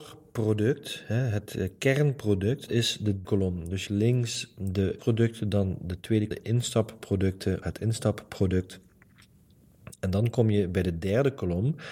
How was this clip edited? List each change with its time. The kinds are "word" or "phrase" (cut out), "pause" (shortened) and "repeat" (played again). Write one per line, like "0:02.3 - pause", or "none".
0:02.7 - word
0:03.2 - word
0:03.9 - word
0:05.0 - word
0:06.3 - word
0:07.6 - word